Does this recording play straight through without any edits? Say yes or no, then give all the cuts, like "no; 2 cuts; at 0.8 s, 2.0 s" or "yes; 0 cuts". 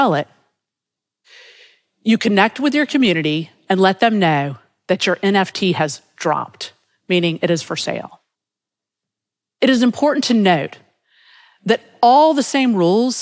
yes; 0 cuts